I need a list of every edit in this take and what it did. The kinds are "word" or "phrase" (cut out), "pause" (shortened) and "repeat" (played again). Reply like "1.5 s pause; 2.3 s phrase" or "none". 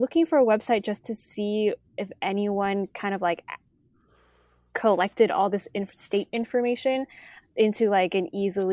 none